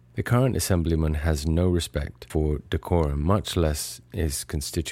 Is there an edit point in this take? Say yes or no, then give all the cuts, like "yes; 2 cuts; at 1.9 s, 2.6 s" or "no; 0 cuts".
no; 0 cuts